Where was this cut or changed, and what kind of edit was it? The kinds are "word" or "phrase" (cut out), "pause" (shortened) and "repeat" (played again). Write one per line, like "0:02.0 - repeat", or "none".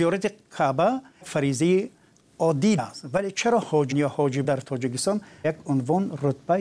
0:01.2 - word
0:02.8 - word
0:03.9 - word
0:04.4 - word
0:05.4 - word